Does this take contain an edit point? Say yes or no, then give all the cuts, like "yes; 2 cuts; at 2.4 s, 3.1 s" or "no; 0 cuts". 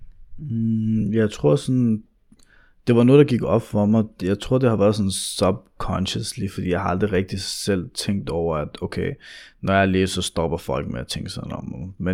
no; 0 cuts